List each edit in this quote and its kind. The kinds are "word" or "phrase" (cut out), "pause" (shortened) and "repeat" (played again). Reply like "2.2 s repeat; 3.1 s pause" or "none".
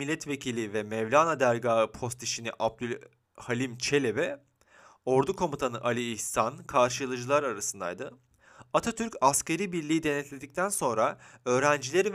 none